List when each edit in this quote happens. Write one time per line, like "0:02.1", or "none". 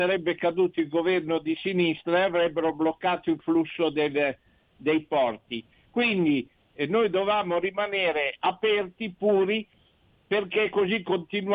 none